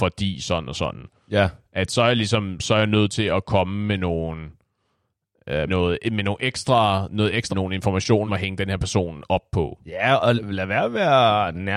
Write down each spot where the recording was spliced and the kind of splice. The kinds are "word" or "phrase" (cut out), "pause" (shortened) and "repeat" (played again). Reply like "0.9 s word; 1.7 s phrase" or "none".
5.7 s word; 7.5 s word; 8.3 s word; 10.4 s word